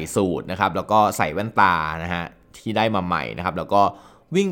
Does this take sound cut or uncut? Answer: uncut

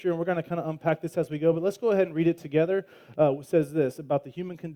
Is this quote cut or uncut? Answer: uncut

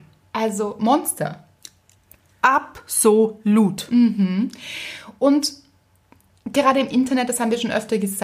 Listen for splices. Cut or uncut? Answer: uncut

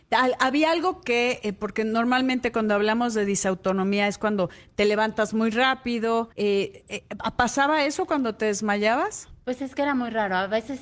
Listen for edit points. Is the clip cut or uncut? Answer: cut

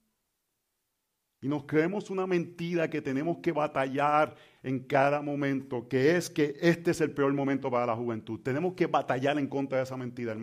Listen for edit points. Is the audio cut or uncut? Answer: uncut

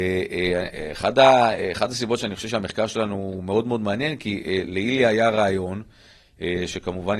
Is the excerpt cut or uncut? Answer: uncut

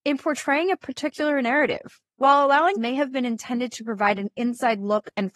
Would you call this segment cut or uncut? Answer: cut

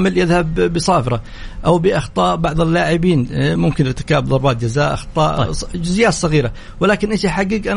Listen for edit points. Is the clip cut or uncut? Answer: uncut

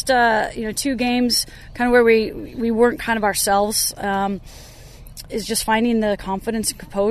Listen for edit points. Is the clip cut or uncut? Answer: uncut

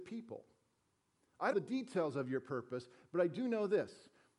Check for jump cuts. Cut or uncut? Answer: cut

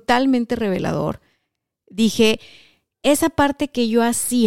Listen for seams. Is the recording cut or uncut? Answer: uncut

